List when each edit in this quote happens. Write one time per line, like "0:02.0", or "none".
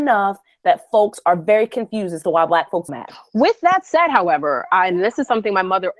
0:02.9